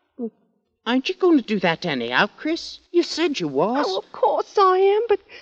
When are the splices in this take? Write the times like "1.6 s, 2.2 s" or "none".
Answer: 2.9 s